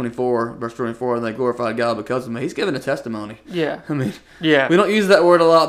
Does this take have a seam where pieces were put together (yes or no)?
no